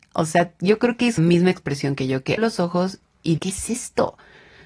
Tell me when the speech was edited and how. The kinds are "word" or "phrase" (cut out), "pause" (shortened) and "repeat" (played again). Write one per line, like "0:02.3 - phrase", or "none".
0:01.2 - word
0:02.4 - word
0:03.4 - word